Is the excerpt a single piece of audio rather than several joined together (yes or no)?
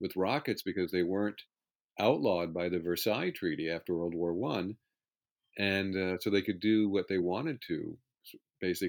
yes